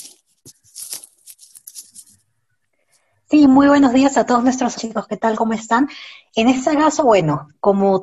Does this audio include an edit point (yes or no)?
yes